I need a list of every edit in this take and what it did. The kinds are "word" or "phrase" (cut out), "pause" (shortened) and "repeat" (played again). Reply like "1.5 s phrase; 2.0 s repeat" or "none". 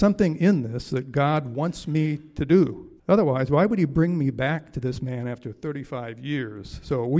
3.0 s pause